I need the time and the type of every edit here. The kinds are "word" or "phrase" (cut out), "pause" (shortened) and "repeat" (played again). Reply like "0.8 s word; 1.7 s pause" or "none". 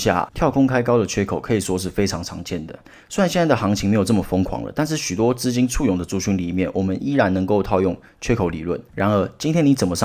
none